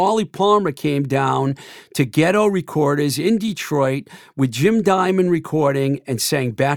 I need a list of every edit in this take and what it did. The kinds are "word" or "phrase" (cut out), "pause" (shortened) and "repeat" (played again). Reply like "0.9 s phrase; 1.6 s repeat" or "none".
none